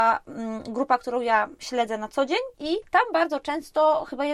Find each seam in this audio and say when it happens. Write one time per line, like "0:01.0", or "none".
0:02.5

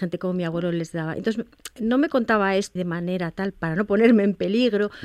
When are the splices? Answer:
0:02.8

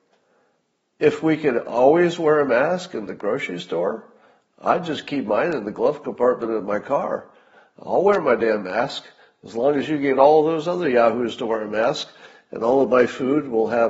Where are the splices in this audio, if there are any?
none

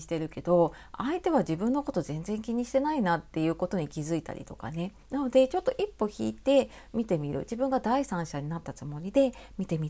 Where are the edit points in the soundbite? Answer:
0:05.0

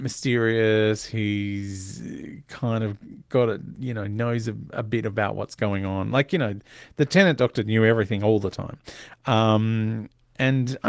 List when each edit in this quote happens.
none

